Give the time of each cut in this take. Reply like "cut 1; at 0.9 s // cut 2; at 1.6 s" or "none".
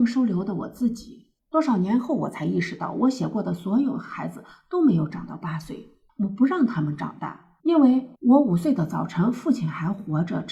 cut 1; at 1.4 s // cut 2; at 6.1 s // cut 3; at 7.6 s // cut 4; at 8.2 s